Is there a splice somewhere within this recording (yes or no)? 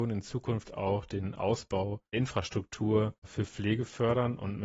yes